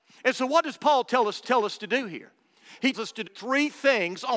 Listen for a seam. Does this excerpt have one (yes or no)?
yes